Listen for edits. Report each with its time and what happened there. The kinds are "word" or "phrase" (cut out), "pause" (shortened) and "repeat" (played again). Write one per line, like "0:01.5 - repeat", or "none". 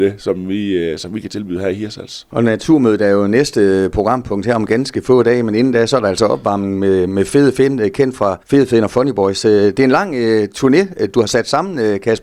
0:08.4 - pause

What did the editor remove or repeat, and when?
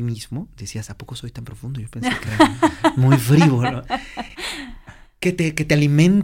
none

